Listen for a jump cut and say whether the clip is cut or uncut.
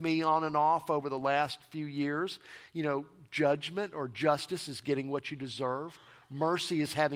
uncut